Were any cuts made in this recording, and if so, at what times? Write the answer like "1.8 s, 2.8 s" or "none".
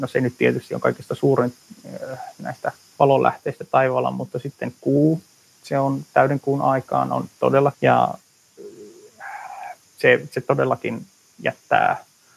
2.9 s, 7.7 s